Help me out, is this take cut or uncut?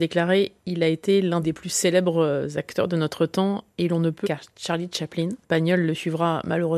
cut